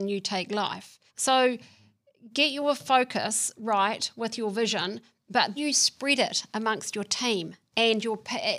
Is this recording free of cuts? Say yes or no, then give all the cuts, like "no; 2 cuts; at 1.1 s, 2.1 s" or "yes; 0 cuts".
no; 2 cuts; at 1.1 s, 5.6 s